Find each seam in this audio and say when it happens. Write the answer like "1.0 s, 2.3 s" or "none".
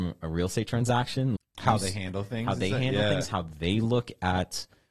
1.4 s